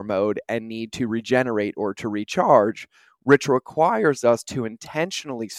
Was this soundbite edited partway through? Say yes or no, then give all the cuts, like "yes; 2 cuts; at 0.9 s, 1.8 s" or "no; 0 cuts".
no; 0 cuts